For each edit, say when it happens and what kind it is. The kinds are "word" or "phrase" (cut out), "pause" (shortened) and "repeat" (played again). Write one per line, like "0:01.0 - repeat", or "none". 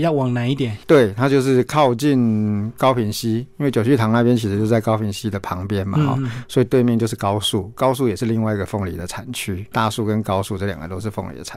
none